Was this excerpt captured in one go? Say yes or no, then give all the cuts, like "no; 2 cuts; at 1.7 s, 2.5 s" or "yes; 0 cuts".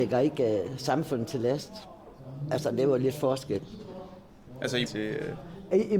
no; 1 cut; at 4.8 s